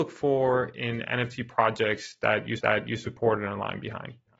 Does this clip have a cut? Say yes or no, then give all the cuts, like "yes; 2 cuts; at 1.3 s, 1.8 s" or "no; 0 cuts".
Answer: yes; 1 cut; at 2.6 s